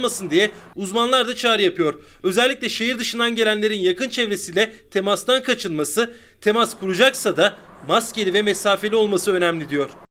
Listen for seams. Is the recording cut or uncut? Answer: uncut